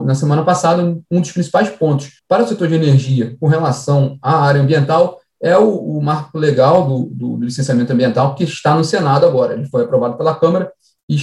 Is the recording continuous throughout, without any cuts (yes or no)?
no